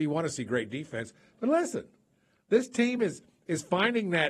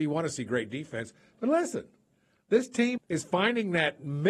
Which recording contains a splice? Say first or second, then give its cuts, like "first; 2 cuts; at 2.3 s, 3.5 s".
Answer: second; 1 cut; at 3.0 s